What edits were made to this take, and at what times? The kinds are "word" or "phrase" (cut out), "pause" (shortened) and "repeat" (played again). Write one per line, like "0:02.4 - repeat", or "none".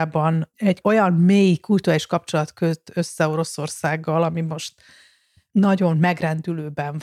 none